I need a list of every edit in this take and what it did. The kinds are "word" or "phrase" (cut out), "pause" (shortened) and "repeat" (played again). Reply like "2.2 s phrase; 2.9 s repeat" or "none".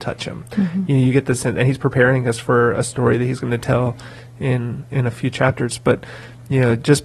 none